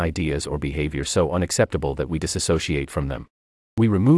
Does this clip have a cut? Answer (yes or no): no